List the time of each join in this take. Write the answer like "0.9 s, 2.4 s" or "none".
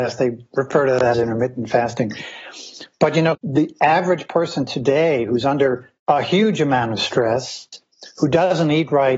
1.1 s, 3.3 s, 6.0 s